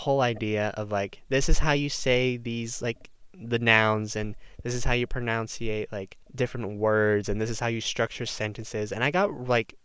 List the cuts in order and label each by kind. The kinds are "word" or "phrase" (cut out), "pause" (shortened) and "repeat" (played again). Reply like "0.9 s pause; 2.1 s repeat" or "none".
6.2 s pause